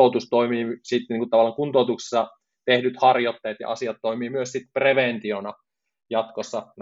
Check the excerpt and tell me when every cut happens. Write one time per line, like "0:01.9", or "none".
none